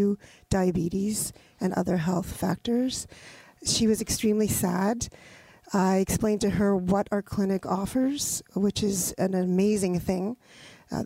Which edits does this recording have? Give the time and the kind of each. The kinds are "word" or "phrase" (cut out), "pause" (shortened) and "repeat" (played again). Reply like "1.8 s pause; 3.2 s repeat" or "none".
none